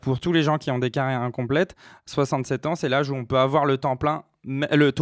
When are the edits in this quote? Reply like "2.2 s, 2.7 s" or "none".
none

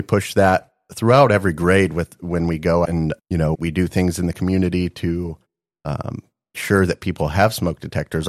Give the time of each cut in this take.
2.8 s, 3.2 s, 3.5 s, 6.5 s

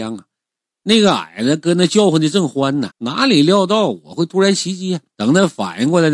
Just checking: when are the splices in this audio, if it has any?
2.9 s, 5.1 s

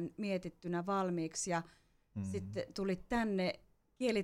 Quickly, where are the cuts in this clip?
none

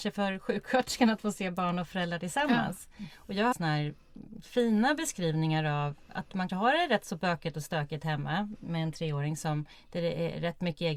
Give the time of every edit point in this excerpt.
3.5 s, 6.5 s, 8.6 s, 9.7 s

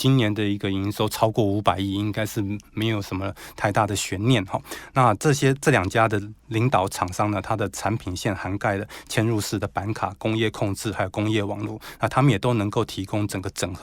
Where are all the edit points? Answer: 6.4 s

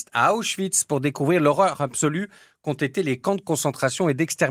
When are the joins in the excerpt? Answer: none

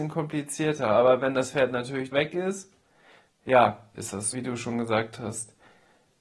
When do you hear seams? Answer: 2.1 s, 3.9 s, 4.3 s

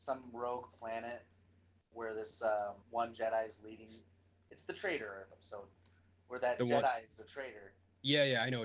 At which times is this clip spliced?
2.8 s

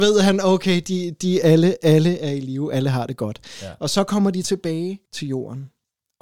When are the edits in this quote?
5.0 s

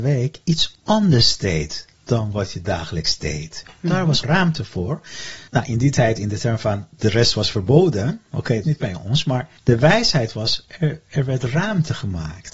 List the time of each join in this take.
1.9 s, 4.2 s, 5.5 s, 8.6 s, 9.6 s

